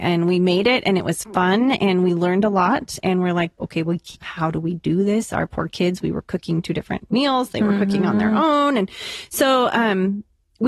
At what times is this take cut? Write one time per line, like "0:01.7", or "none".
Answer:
0:04.1